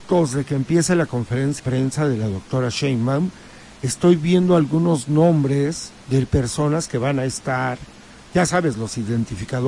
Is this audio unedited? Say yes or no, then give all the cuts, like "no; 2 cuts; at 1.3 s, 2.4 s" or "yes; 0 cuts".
no; 2 cuts; at 1.6 s, 6.0 s